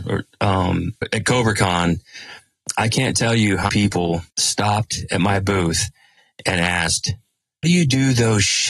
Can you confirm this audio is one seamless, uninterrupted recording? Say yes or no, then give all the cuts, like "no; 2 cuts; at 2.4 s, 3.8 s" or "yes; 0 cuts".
no; 4 cuts; at 1.0 s, 3.7 s, 4.3 s, 7.6 s